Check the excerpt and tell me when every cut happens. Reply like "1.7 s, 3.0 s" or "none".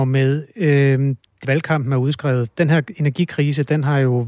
1.4 s